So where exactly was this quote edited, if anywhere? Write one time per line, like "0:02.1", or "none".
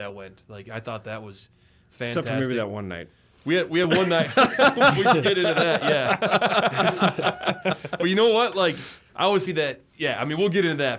0:09.5